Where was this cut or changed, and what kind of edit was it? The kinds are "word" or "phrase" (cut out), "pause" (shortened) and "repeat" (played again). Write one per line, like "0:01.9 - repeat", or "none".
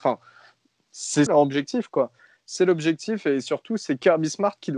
0:01.3 - word